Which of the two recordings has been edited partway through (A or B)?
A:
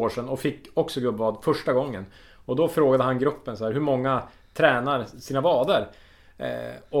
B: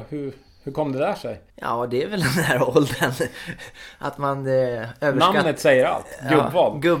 B